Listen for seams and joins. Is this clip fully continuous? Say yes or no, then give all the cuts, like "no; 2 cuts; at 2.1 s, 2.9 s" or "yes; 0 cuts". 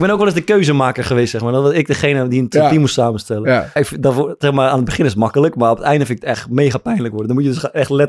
no; 1 cut; at 3.8 s